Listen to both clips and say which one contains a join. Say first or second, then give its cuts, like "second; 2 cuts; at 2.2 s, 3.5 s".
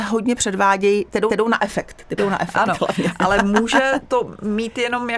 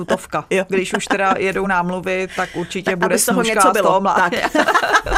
first; 2 cuts; at 1.3 s, 2.2 s